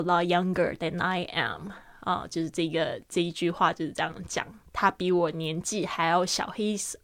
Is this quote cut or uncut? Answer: uncut